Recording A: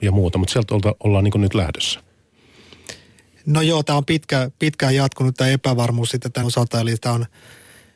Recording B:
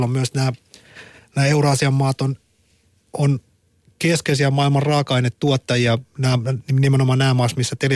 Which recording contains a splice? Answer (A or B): A